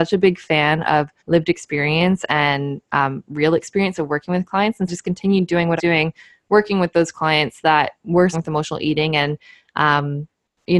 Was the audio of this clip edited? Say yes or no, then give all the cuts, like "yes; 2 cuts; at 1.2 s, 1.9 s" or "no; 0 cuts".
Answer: yes; 4 cuts; at 1.2 s, 4.9 s, 5.8 s, 8.3 s